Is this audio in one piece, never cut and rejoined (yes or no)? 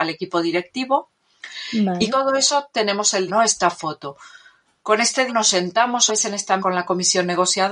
no